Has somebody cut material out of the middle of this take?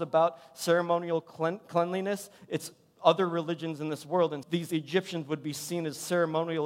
yes; 1 cut; at 4.4 s

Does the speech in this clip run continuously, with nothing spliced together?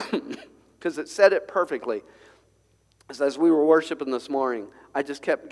yes; 0 cuts

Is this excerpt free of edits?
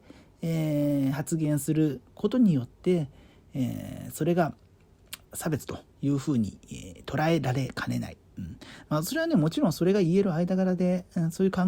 no; 2 cuts; at 5.2 s, 5.9 s

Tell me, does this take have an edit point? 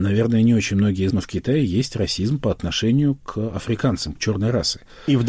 yes; 2 cuts; at 1.1 s, 4.2 s

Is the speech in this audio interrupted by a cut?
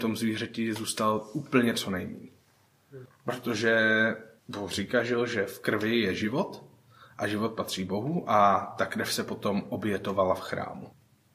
no; 0 cuts

